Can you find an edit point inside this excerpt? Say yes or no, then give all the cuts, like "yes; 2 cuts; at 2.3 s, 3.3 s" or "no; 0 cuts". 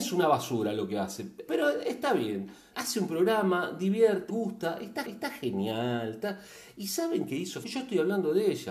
yes; 5 cuts; at 1.5 s, 2.7 s, 4.3 s, 5.0 s, 7.6 s